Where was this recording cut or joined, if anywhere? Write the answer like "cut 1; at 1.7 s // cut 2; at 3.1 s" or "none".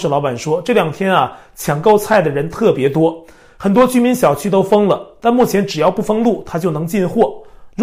none